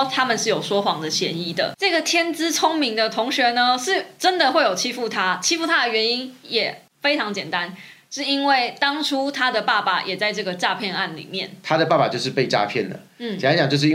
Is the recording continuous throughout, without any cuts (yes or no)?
yes